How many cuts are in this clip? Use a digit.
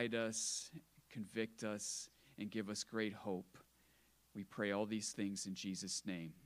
0